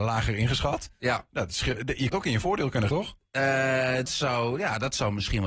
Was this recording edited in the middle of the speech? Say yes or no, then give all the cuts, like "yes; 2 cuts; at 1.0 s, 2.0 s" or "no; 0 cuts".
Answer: yes; 3 cuts; at 2.1 s, 2.9 s, 4.0 s